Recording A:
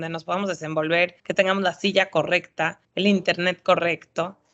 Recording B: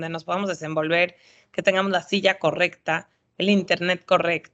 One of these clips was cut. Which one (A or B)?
A